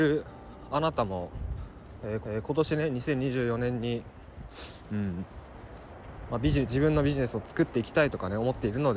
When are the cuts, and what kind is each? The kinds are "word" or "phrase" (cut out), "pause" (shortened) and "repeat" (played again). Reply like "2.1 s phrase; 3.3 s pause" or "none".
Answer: 2.2 s repeat